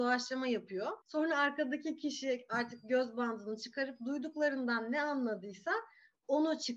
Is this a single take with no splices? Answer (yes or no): no